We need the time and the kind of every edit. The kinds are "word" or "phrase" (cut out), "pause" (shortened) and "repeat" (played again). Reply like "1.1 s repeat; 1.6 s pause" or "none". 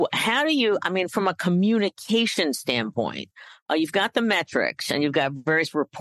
none